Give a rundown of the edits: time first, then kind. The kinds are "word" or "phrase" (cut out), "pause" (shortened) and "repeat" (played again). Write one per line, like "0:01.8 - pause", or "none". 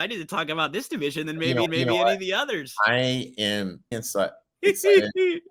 0:01.7 - repeat
0:03.9 - word